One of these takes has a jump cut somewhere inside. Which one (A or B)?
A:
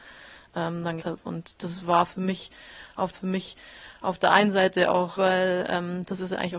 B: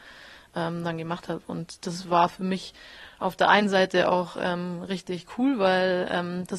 A